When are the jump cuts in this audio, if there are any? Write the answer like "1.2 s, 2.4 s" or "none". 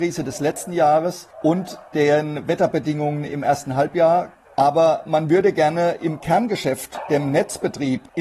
none

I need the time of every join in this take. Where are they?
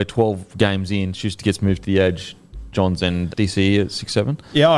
2.7 s, 3.3 s

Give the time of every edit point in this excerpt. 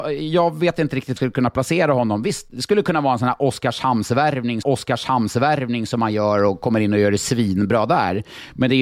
1.2 s, 4.6 s

